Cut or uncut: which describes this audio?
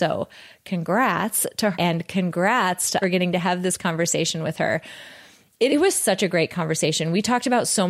cut